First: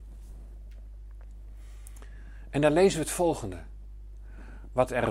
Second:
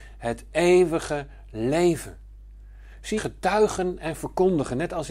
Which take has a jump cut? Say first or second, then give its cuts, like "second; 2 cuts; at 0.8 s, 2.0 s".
second; 1 cut; at 3.2 s